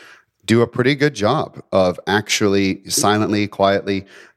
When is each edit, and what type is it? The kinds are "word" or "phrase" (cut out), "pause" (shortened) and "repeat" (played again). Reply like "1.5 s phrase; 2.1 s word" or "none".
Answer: none

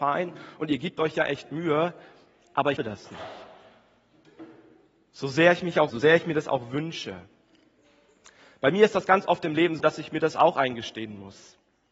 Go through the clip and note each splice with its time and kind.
2.8 s word; 5.9 s word; 9.8 s word

